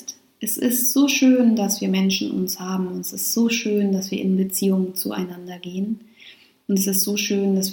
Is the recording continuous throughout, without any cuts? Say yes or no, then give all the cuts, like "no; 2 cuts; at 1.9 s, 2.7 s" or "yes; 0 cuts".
yes; 0 cuts